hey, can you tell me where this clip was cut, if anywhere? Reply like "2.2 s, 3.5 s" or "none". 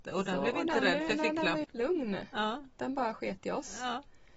1.6 s